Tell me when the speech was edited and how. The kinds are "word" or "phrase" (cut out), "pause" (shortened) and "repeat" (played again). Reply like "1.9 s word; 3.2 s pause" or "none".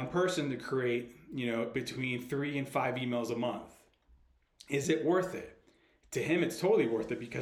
none